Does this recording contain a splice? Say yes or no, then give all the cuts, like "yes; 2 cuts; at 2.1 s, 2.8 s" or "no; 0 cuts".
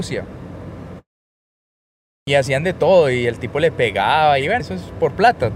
yes; 1 cut; at 4.6 s